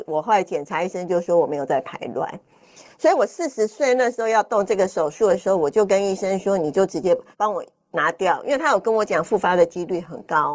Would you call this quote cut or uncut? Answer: cut